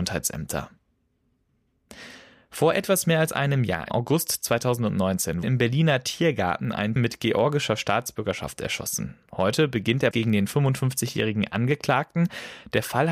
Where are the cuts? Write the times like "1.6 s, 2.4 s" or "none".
3.9 s, 5.4 s, 7.0 s, 10.1 s

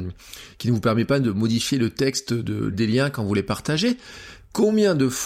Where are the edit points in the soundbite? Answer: 2.7 s

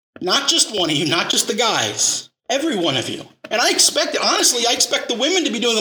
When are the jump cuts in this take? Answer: 2.4 s

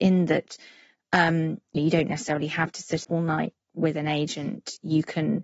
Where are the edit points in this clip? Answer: 1.8 s, 3.0 s, 3.7 s

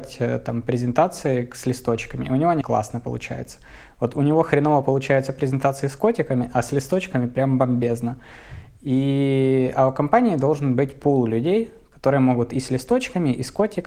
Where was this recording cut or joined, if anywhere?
2.6 s

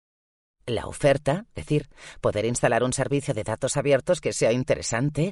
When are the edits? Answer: 1.5 s

